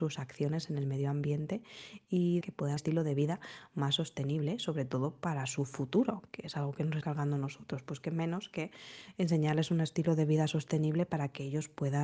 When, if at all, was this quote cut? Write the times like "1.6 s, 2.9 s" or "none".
2.4 s, 2.8 s, 7.0 s